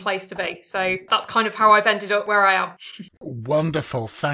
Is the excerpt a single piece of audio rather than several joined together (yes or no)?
yes